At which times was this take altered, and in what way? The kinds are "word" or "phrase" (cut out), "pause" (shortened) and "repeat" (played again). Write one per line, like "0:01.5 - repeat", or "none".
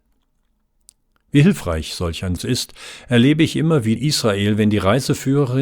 0:02.4 - word
0:04.0 - word